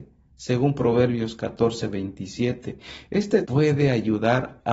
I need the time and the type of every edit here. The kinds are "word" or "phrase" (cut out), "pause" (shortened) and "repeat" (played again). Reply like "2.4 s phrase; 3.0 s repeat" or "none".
3.4 s word